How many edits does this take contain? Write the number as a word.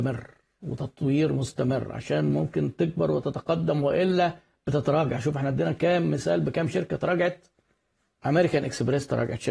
zero